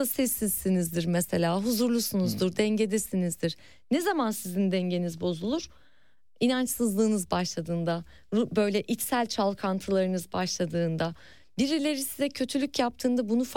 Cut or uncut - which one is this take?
uncut